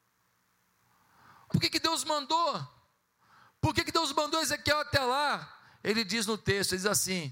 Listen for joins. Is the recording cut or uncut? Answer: cut